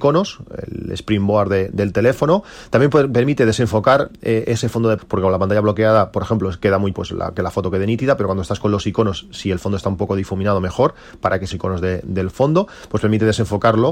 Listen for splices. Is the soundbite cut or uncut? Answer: cut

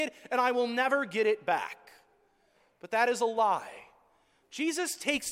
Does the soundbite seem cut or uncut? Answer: uncut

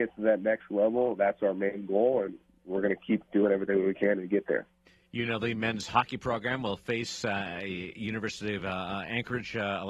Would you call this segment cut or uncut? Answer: uncut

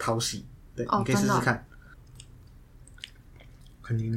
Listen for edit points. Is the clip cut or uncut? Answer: uncut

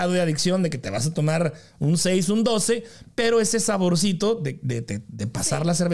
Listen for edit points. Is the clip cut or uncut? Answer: uncut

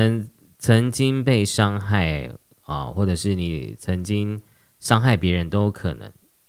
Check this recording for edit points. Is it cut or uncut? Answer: uncut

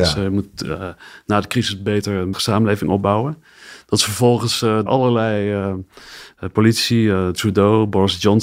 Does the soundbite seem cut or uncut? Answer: cut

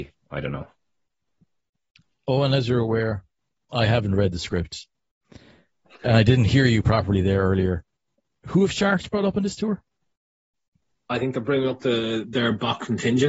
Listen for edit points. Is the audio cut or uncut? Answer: uncut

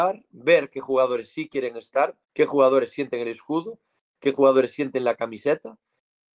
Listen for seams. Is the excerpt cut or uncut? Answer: cut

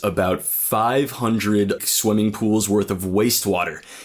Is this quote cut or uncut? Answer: cut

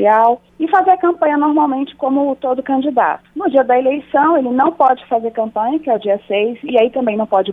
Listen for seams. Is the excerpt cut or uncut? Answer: uncut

